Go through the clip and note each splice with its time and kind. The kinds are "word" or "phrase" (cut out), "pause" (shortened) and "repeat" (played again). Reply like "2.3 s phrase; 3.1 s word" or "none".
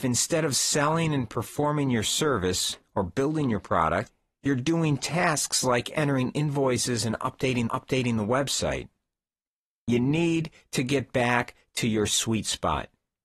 7.7 s repeat